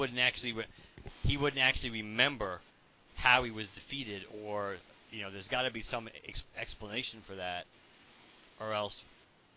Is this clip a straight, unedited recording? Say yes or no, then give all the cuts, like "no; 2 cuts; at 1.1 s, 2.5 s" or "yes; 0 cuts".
yes; 0 cuts